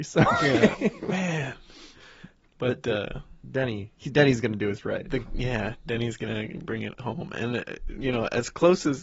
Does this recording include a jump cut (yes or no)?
no